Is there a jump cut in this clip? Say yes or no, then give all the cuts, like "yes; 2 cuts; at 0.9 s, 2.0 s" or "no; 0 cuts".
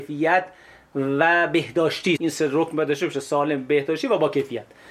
yes; 1 cut; at 2.2 s